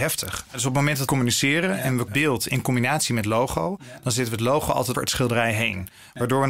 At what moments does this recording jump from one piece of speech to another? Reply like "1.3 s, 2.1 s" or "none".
1.1 s, 2.1 s, 4.9 s